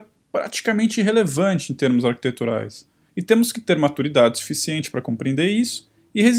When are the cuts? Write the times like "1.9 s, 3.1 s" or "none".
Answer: none

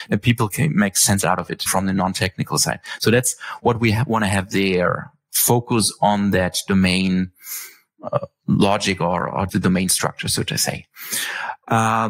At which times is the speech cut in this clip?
1.7 s, 9.5 s

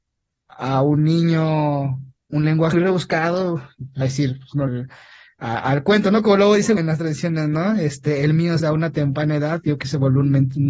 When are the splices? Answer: 2.7 s, 4.0 s, 4.7 s, 6.8 s, 8.6 s, 9.8 s

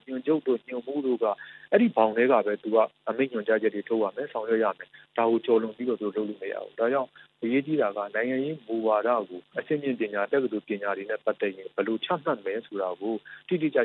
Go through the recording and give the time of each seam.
none

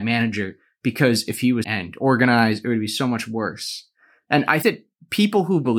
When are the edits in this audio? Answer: 1.6 s, 4.6 s

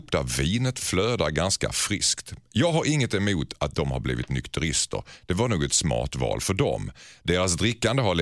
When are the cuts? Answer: none

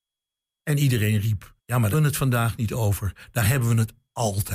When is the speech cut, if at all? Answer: 1.6 s, 1.9 s

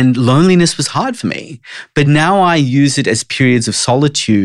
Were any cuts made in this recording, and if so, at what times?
none

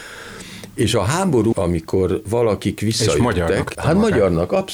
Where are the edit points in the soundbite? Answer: 1.5 s, 3.7 s

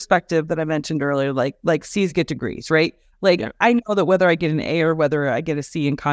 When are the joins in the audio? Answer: none

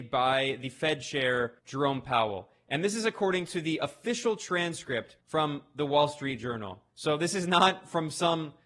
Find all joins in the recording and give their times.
1.6 s, 5.2 s, 6.9 s

